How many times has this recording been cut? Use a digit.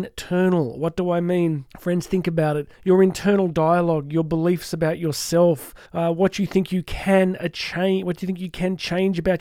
3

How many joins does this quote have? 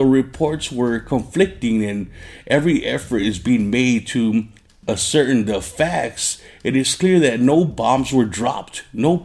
0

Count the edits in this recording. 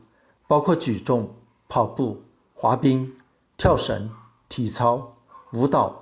0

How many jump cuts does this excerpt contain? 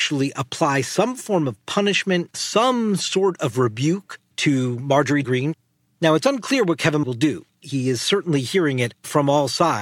3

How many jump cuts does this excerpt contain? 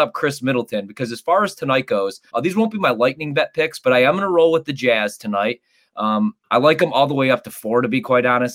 2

